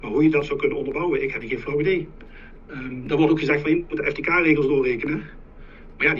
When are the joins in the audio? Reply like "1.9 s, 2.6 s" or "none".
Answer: 1.4 s